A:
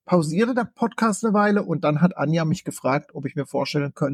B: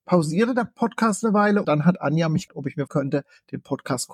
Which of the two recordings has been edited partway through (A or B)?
B